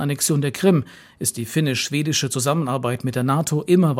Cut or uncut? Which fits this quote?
uncut